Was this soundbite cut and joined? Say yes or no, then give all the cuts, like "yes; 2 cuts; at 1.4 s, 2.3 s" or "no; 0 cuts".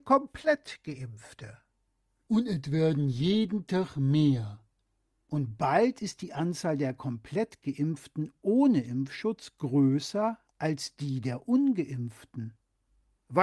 no; 0 cuts